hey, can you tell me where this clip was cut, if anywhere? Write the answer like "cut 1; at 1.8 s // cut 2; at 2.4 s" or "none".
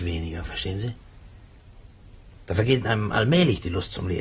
none